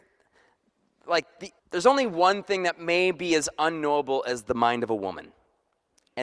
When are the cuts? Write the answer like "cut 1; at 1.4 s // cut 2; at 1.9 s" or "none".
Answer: cut 1; at 1.6 s